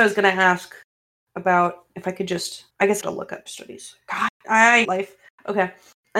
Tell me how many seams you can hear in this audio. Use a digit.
4